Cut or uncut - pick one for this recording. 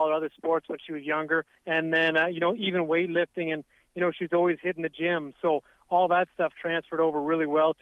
cut